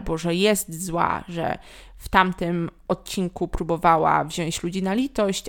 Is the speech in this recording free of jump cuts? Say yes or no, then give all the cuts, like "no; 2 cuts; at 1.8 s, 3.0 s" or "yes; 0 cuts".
yes; 0 cuts